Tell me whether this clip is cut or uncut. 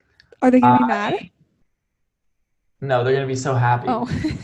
uncut